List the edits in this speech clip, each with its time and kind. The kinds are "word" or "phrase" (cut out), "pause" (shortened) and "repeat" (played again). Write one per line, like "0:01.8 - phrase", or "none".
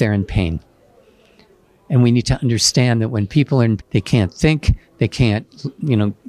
0:03.8 - word